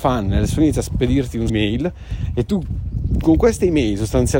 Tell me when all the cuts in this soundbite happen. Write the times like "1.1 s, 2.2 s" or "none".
1.5 s

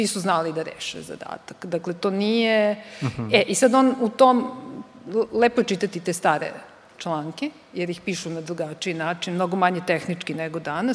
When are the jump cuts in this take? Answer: 7.7 s

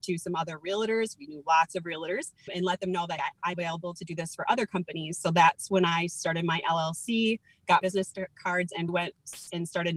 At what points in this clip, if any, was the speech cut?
2.5 s, 3.2 s, 3.5 s, 7.8 s, 8.9 s

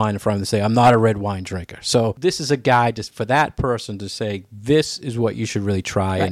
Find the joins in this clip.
none

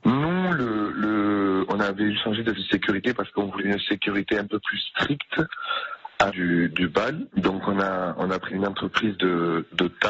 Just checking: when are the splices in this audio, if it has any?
2.1 s, 2.6 s, 3.6 s, 6.3 s, 8.5 s

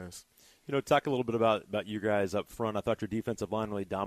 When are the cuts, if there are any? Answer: none

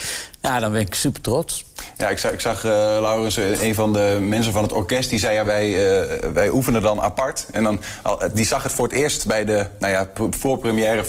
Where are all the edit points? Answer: 5.4 s

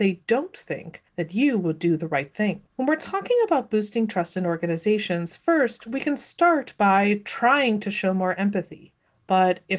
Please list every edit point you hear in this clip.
2.7 s

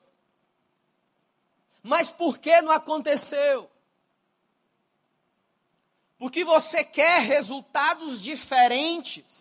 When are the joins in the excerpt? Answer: none

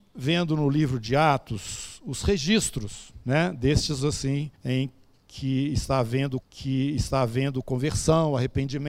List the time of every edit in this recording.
3.2 s, 4.0 s, 4.5 s, 6.4 s

